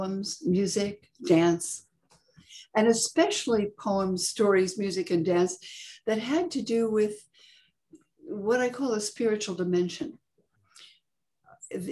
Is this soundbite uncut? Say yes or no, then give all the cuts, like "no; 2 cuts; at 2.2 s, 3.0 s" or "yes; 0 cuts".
yes; 0 cuts